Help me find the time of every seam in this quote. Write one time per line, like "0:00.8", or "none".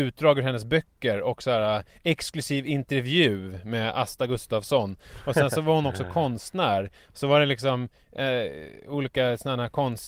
none